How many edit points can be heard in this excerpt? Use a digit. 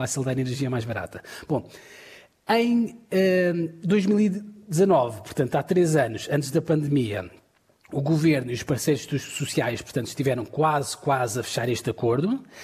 0